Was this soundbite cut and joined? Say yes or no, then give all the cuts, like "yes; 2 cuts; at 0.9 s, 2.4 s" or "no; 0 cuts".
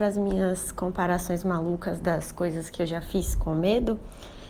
no; 0 cuts